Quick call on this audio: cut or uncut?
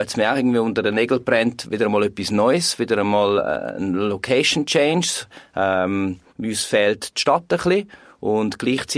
cut